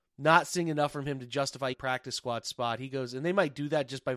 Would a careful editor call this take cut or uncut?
cut